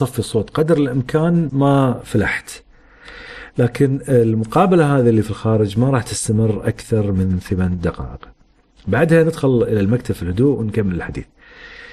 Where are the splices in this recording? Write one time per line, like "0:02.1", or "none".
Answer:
0:01.5